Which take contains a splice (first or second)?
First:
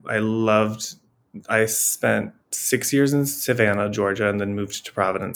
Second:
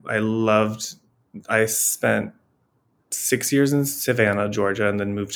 first